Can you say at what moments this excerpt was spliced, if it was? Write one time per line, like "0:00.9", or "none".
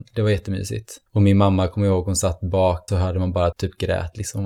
0:01.1
0:02.9
0:03.5